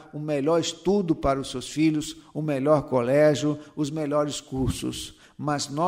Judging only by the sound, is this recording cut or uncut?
uncut